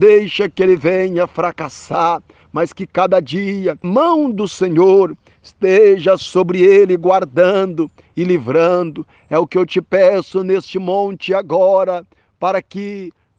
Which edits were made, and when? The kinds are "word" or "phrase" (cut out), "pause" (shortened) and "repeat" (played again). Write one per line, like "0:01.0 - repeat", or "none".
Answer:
0:03.8 - word